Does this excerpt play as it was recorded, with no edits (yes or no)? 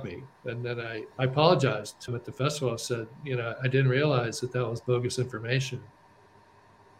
no